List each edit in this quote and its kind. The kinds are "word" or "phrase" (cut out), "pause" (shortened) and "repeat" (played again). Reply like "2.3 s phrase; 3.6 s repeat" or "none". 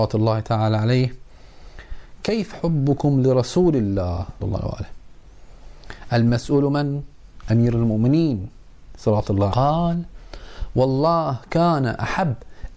2.5 s word; 4.4 s word; 9.5 s word